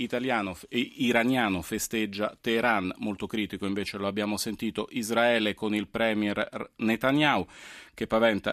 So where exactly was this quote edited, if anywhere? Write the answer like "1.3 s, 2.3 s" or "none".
none